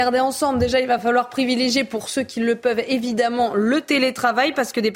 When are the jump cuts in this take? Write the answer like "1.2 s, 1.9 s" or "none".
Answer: none